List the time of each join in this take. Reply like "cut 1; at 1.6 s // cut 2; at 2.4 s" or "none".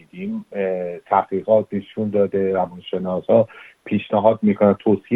none